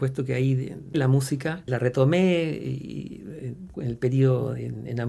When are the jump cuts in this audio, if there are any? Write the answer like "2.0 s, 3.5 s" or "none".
0.9 s, 1.7 s, 3.7 s

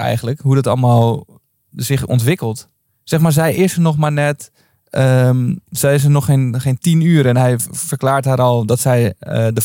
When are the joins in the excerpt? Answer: none

